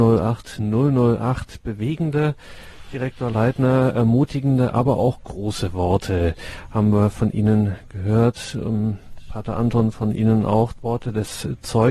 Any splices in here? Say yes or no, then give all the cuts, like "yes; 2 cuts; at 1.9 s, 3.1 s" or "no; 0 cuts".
no; 0 cuts